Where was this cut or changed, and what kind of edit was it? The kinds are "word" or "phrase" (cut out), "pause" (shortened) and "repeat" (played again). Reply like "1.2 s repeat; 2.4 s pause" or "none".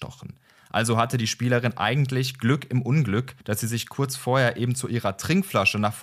3.4 s pause

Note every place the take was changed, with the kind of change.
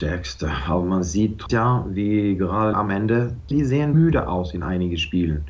1.5 s phrase; 2.7 s phrase; 3.5 s word; 3.9 s word

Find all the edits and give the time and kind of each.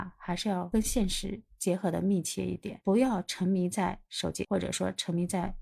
4.4 s word

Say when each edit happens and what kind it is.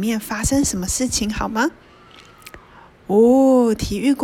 none

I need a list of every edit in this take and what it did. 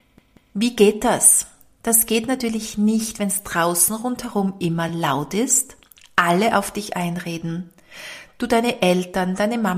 none

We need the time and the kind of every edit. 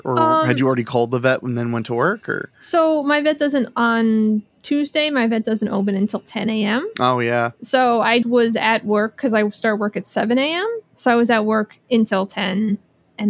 8.2 s word

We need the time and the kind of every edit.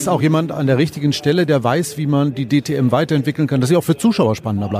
none

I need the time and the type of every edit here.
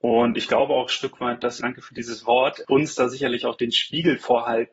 1.6 s phrase; 2.6 s word

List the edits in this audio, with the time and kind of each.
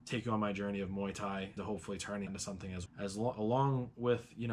1.6 s word; 2.3 s word; 2.9 s word; 3.3 s word

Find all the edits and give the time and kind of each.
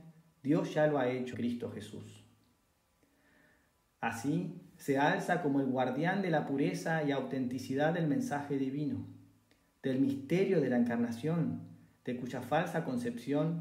1.3 s word

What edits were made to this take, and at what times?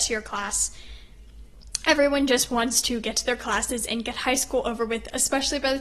none

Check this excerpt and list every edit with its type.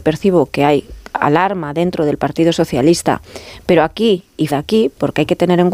4.5 s word

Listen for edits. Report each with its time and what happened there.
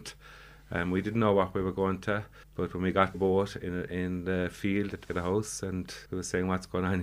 2.4 s pause; 3.1 s phrase; 5.1 s word; 6.1 s pause

